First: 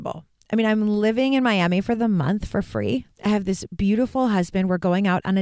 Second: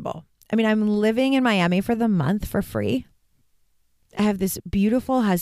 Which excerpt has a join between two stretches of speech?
first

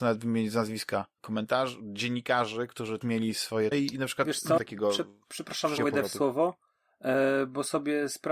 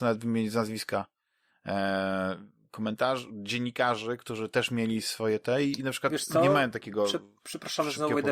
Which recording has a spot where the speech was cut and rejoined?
first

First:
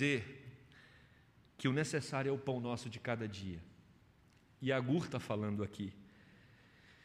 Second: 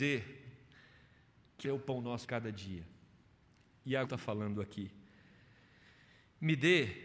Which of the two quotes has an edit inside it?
second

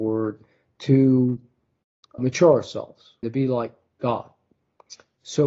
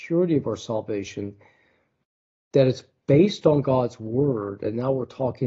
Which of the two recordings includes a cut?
first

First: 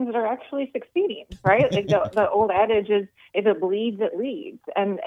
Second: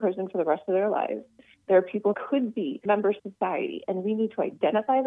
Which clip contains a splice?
second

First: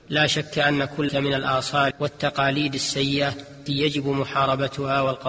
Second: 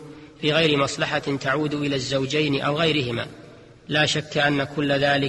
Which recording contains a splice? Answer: first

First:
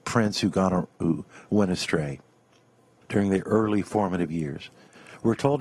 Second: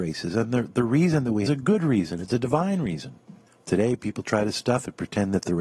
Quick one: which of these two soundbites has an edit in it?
second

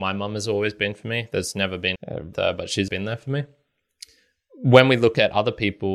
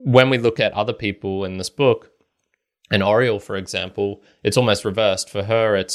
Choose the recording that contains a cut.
first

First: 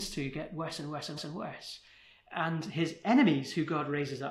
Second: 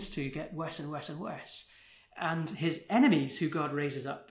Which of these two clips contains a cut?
first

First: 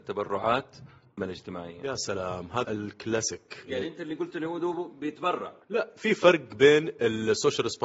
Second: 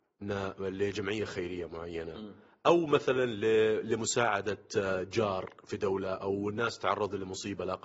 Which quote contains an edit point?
first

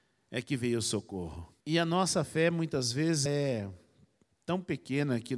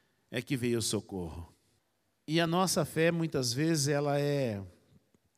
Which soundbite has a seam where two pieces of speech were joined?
first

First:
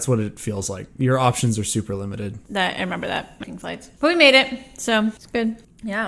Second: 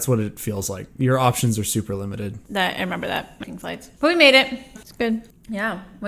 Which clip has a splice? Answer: second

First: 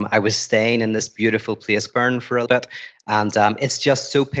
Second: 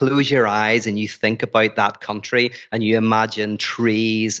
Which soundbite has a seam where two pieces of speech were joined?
first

